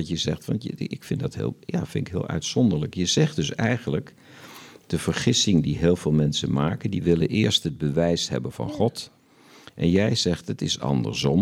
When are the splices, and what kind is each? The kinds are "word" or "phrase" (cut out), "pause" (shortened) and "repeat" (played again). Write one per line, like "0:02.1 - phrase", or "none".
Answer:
none